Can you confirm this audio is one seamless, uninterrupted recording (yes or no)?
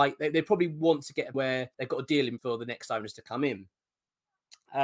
no